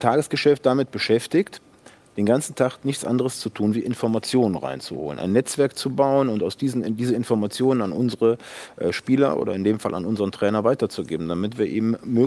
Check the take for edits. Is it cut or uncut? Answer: uncut